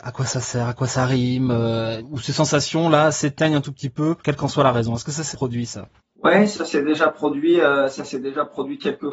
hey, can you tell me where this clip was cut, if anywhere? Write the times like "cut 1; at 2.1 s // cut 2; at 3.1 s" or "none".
cut 1; at 2.0 s // cut 2; at 4.2 s // cut 3; at 5.3 s // cut 4; at 6.0 s